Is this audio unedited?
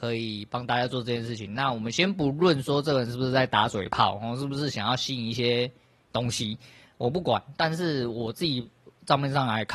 yes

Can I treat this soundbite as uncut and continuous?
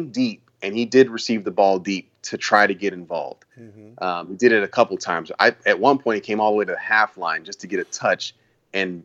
no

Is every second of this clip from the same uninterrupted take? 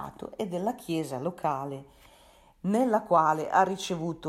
yes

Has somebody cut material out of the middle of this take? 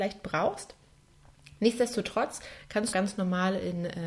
yes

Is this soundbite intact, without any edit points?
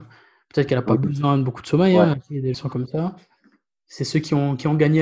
no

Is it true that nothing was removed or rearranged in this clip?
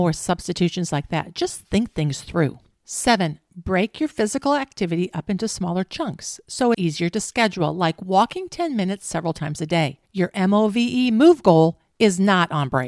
no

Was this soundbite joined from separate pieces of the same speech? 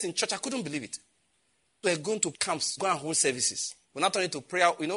yes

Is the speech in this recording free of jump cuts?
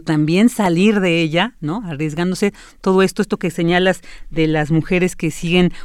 yes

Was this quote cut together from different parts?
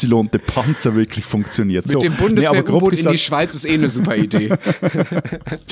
no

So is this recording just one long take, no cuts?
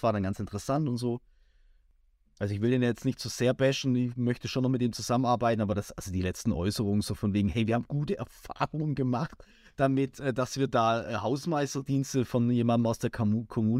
yes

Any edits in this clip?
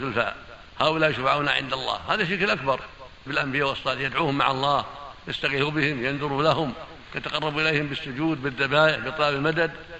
yes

